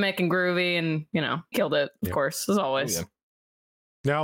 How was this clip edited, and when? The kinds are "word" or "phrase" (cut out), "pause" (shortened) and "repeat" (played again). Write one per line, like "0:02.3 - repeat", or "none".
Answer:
0:01.5 - word